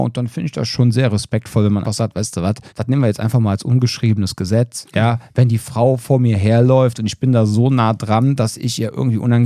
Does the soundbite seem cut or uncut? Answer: cut